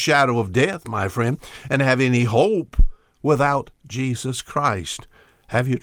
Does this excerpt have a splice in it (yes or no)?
no